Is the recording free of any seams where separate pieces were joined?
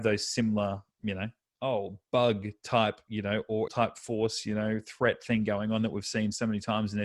no; 1 cut; at 3.7 s

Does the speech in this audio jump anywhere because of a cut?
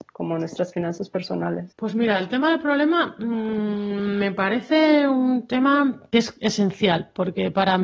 no; 0 cuts

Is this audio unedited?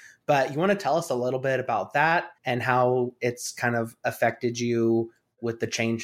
no; 1 cut; at 2.4 s

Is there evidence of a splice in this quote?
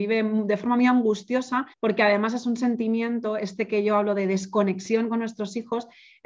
yes; 1 cut; at 1.7 s

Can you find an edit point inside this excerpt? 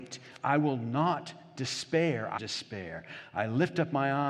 yes; 1 cut; at 2.4 s

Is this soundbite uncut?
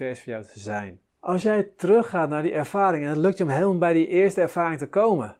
yes; 0 cuts

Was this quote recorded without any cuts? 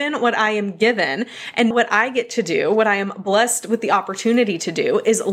no; 1 cut; at 1.7 s

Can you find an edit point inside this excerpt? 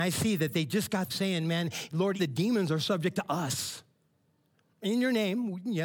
yes; 2 cuts; at 1.1 s, 2.2 s

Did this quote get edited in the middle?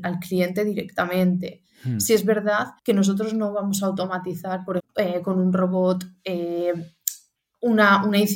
yes; 2 cuts; at 2.8 s, 4.8 s

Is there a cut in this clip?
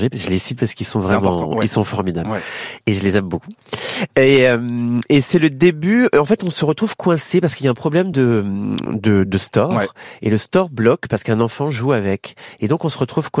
no; 0 cuts

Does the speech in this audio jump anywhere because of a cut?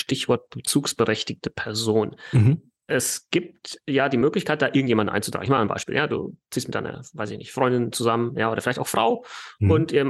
no; 0 cuts

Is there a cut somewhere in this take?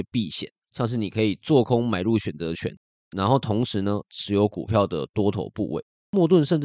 no; 0 cuts

